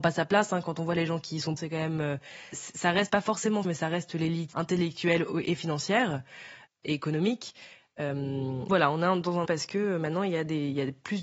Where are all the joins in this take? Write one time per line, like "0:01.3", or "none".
0:01.6
0:02.5
0:03.1
0:03.6
0:04.5
0:05.4
0:08.7
0:09.4